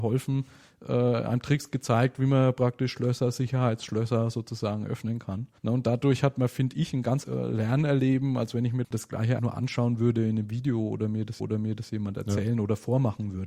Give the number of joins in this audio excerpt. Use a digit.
4